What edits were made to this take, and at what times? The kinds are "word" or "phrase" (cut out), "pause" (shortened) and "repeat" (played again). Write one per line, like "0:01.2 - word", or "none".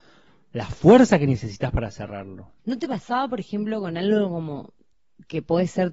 0:02.6 - pause